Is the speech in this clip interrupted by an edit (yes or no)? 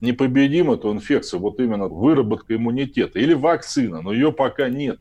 yes